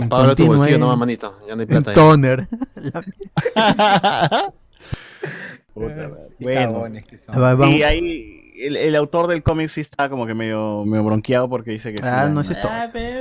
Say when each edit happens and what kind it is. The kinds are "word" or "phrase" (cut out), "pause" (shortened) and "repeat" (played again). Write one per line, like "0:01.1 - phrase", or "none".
0:06.3 - pause
0:10.8 - word